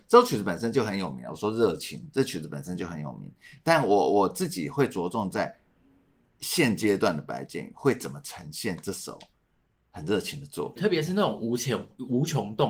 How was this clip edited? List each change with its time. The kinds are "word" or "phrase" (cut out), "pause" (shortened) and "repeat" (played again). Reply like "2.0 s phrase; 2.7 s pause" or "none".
10.8 s word

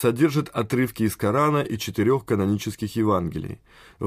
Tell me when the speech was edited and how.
none

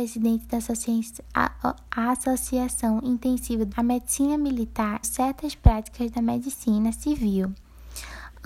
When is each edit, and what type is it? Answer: 3.7 s word; 5.0 s word

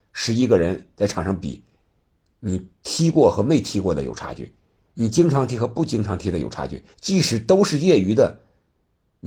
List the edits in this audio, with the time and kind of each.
6.9 s pause

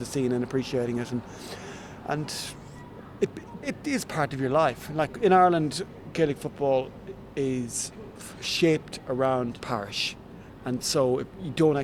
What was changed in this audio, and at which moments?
3.6 s word; 8.2 s word; 9.6 s word

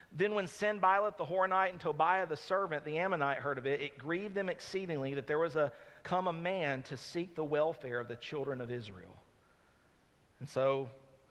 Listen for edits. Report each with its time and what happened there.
6.0 s pause

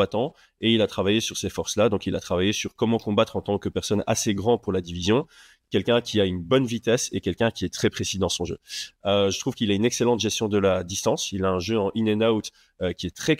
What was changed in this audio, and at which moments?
none

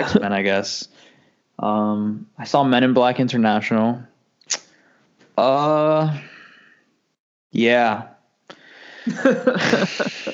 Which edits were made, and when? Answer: none

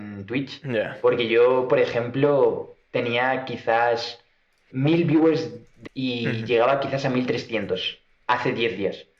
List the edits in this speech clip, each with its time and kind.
4.7 s word; 5.9 s word

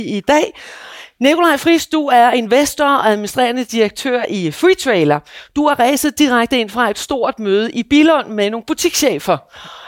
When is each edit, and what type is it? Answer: none

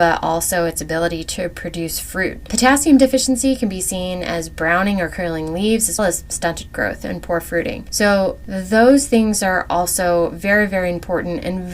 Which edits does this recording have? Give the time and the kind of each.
6.0 s word

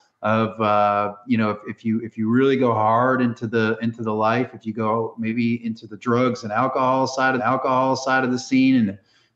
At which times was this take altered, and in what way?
7.4 s repeat

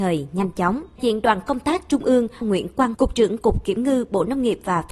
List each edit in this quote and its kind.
1.0 s word; 2.4 s word; 2.9 s word

